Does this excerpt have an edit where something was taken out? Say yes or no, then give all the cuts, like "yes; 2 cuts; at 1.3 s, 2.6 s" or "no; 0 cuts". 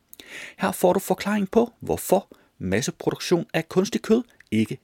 no; 0 cuts